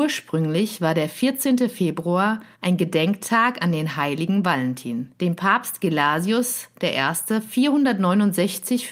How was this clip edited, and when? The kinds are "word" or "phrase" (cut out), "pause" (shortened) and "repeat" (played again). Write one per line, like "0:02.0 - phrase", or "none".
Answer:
0:02.5 - pause
0:05.2 - pause